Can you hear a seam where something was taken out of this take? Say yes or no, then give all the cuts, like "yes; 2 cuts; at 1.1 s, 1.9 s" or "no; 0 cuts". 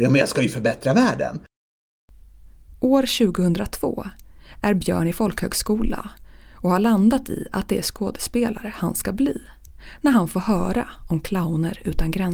no; 0 cuts